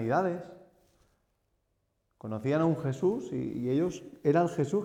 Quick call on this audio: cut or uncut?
uncut